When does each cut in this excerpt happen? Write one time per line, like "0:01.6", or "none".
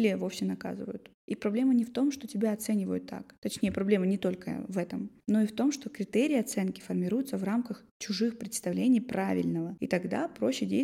none